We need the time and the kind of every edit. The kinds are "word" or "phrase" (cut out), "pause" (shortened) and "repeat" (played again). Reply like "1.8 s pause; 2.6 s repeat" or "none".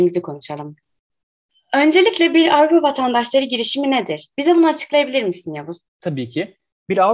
5.9 s pause